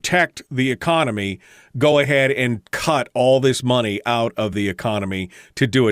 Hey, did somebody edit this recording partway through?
no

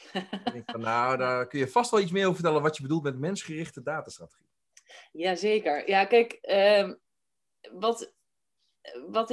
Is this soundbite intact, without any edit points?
yes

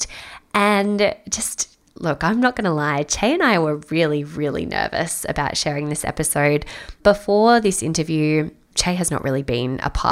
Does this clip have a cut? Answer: no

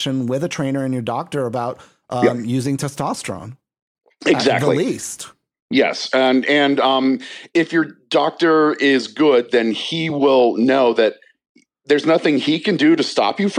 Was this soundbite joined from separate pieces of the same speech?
no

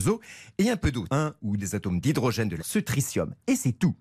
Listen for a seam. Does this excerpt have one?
yes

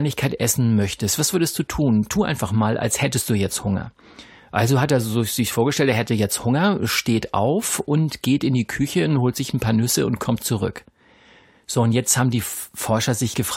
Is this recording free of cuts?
yes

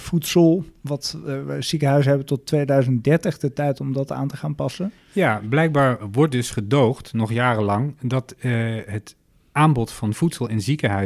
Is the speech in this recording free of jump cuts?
yes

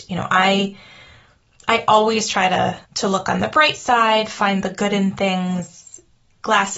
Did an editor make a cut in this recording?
yes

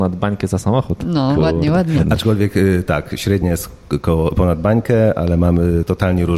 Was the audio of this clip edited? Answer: no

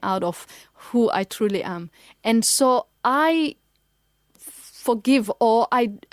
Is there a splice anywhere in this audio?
no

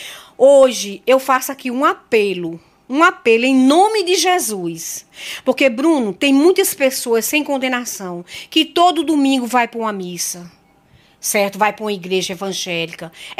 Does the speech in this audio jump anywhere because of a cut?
no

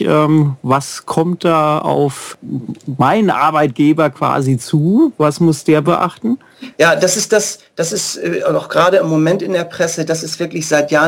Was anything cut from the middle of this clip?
no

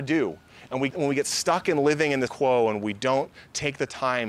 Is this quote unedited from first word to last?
no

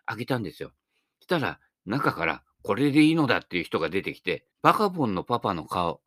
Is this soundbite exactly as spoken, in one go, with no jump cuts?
no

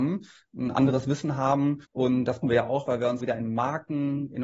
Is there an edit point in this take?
yes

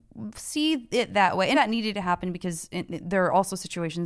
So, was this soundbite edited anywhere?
yes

